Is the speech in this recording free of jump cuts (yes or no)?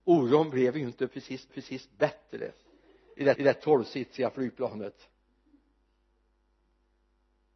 no